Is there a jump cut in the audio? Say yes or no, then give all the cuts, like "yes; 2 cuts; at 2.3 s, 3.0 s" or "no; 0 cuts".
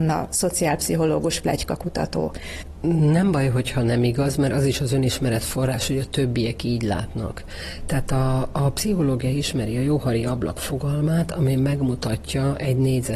no; 0 cuts